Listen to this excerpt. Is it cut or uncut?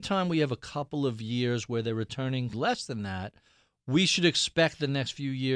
cut